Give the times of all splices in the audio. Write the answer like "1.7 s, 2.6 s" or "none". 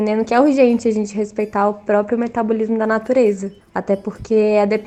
none